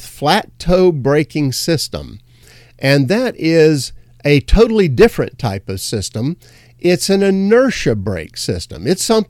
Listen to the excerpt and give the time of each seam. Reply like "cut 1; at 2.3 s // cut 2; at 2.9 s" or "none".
none